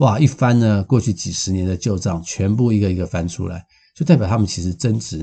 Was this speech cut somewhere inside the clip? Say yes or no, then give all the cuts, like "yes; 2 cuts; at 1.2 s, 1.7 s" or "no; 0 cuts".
no; 0 cuts